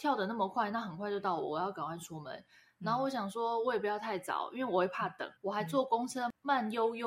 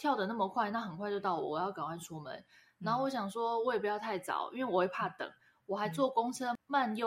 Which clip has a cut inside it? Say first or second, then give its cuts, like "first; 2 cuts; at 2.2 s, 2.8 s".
first; 1 cut; at 5.4 s